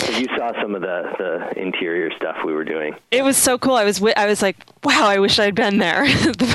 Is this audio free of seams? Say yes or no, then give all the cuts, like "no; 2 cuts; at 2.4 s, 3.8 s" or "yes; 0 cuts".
no; 1 cut; at 3.0 s